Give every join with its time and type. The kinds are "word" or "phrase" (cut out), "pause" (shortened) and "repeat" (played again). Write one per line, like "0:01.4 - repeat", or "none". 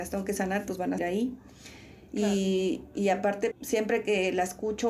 0:01.0 - word
0:03.5 - word

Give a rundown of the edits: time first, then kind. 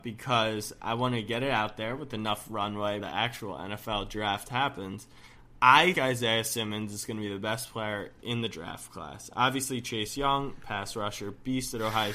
0:03.0 - word
0:05.9 - word

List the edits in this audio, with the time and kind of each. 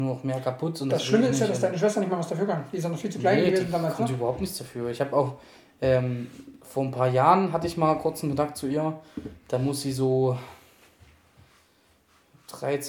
none

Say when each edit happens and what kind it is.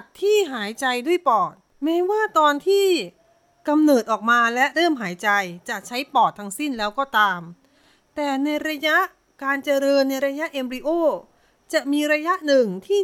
none

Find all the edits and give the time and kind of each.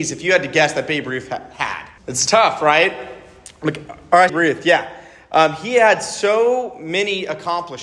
0:02.0 - pause
0:04.3 - phrase

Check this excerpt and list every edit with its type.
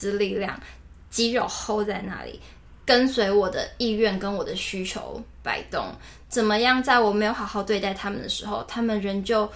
none

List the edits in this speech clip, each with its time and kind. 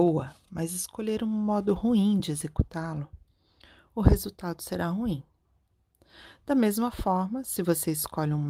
none

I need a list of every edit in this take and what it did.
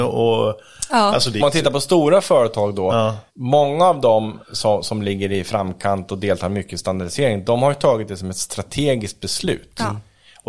0:01.4 - phrase
0:03.3 - pause
0:04.4 - pause

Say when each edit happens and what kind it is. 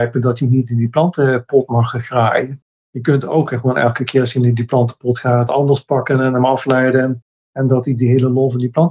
0:05.5 - phrase

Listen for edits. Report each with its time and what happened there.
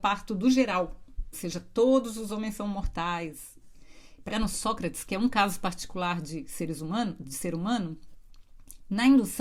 0:01.3 - phrase
0:04.3 - phrase

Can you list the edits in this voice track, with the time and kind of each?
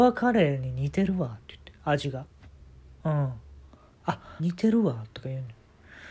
0:02.6 - pause
0:04.4 - word

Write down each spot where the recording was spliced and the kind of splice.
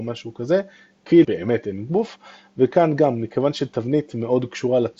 0:01.2 - word

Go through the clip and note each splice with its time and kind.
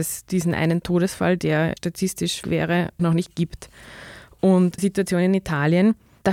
0:01.8 - word
0:02.4 - word
0:03.0 - word
0:04.8 - word

